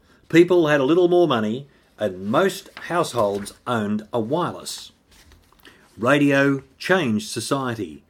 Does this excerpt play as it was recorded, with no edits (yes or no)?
yes